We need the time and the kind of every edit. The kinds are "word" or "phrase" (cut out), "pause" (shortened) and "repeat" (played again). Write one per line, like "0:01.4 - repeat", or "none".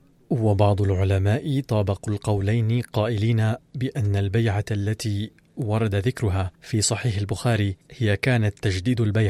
0:06.5 - pause
0:07.8 - pause